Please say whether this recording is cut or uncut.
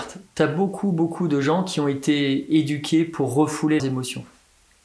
cut